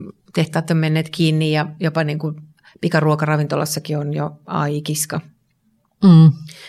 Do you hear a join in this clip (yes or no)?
no